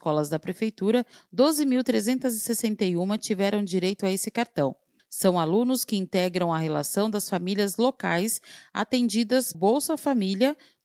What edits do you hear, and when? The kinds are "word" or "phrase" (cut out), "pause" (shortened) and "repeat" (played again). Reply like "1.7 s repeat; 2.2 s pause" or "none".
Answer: 9.5 s word